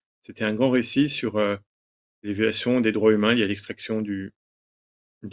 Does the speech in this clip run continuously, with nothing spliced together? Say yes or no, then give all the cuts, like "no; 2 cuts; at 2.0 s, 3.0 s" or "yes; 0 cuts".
yes; 0 cuts